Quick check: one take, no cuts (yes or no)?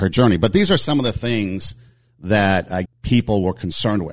no